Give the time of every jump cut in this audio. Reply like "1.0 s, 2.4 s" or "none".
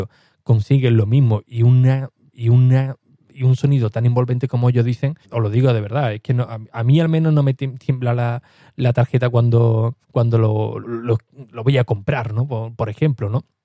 2.3 s, 5.2 s, 10.0 s, 10.8 s